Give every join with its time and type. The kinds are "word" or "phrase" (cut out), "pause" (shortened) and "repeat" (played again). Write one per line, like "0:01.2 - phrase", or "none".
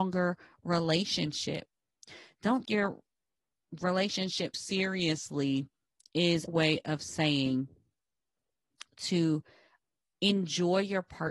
0:02.6 - word
0:04.5 - word
0:06.5 - word